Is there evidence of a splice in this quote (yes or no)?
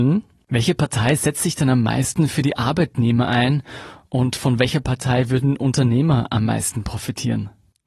no